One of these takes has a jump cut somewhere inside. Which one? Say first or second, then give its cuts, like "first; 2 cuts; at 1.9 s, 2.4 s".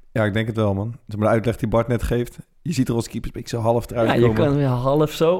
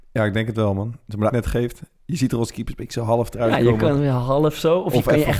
second; 1 cut; at 1.3 s